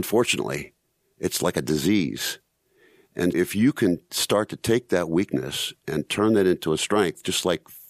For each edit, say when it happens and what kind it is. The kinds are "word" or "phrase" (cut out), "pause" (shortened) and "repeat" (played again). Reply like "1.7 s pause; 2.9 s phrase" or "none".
3.3 s word